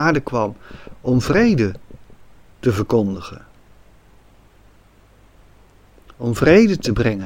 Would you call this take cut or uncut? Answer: uncut